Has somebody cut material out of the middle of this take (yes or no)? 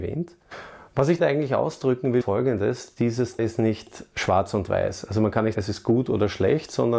yes